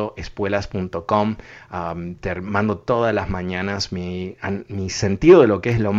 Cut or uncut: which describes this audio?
uncut